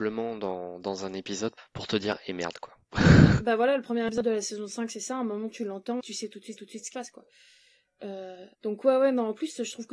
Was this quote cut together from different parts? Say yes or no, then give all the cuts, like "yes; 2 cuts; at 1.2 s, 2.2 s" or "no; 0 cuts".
yes; 5 cuts; at 1.6 s, 6.0 s, 6.6 s, 6.9 s, 8.5 s